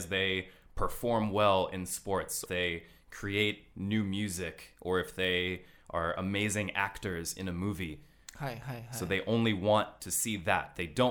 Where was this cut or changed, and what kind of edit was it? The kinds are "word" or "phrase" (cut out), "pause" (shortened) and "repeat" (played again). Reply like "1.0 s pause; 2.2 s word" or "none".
2.5 s phrase